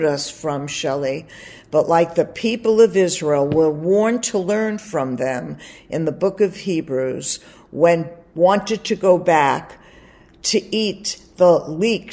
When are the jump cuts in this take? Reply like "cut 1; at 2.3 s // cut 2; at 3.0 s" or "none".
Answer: none